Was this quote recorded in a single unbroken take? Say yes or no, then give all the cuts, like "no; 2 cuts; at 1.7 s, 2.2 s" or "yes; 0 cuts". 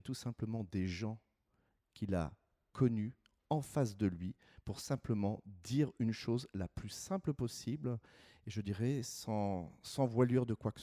yes; 0 cuts